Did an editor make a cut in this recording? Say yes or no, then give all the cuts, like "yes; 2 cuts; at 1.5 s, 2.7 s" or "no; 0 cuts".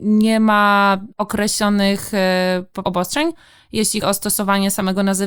yes; 3 cuts; at 1.1 s, 2.8 s, 4.0 s